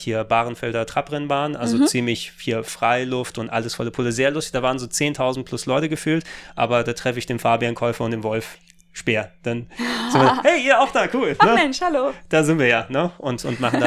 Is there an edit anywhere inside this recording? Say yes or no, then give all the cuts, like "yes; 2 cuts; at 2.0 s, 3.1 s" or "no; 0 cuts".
no; 0 cuts